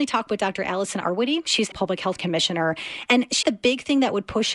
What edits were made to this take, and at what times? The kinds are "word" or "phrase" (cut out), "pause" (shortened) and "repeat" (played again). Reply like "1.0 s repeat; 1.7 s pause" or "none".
1.7 s word; 2.2 s word; 3.4 s word